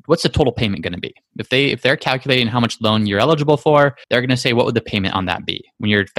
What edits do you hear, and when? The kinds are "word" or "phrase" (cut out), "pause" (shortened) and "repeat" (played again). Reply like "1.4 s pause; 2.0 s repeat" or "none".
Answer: 4.0 s pause